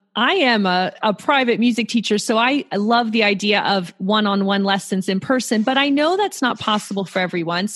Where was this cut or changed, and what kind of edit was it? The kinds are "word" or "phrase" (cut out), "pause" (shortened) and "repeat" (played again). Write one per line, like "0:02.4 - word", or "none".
none